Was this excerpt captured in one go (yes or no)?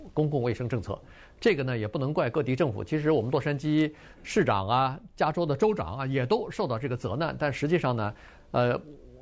yes